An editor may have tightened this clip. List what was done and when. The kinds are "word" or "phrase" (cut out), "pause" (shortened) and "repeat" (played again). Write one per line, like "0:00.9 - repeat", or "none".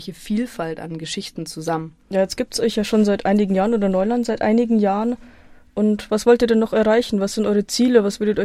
0:02.0 - pause